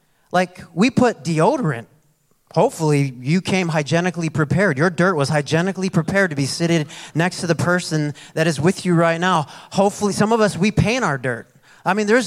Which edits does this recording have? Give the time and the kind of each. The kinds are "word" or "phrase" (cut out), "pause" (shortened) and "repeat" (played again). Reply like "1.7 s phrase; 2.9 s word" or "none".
none